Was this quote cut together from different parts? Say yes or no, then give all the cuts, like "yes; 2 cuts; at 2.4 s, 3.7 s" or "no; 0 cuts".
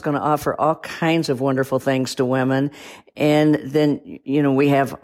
no; 0 cuts